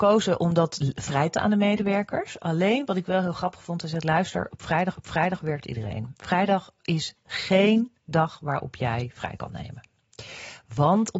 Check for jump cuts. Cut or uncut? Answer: cut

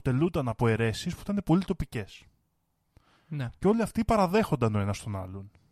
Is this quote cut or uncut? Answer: uncut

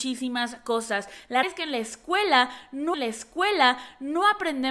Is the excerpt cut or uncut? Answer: cut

